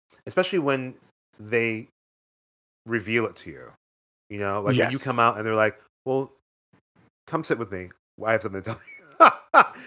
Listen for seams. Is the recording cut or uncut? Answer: uncut